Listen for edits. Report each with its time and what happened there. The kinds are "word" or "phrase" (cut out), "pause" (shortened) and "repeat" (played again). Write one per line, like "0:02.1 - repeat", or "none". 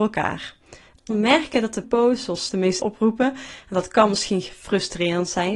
0:01.1 - word
0:01.8 - word
0:02.5 - word
0:02.8 - word